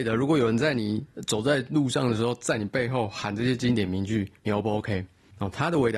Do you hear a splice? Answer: yes; 1 cut; at 4.4 s

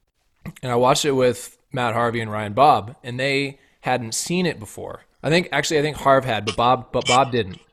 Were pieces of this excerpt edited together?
yes; 2 cuts; at 1.6 s, 5.1 s

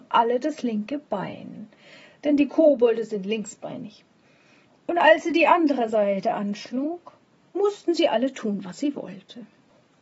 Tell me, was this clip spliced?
no; 0 cuts

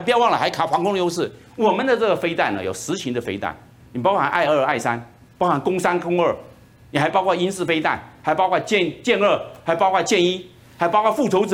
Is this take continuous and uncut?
yes; 0 cuts

